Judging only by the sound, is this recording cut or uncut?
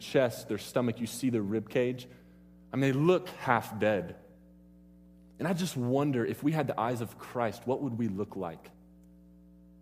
uncut